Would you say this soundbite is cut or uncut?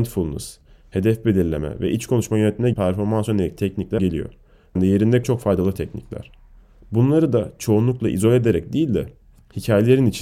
cut